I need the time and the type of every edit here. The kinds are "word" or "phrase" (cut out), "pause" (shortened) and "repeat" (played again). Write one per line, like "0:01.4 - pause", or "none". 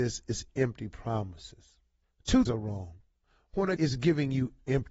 0:02.5 - word
0:03.8 - word